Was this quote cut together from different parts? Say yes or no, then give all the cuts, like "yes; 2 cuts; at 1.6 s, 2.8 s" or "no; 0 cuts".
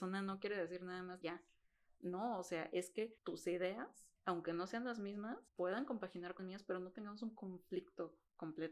yes; 4 cuts; at 1.2 s, 3.2 s, 5.5 s, 6.4 s